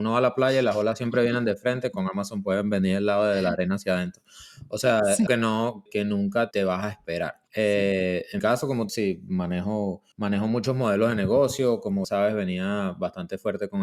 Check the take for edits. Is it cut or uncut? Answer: cut